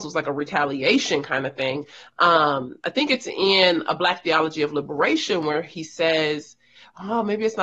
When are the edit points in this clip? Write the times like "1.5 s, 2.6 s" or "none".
none